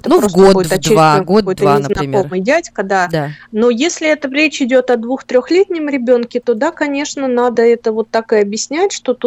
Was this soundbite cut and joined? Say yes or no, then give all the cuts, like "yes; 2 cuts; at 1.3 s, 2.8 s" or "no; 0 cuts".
no; 0 cuts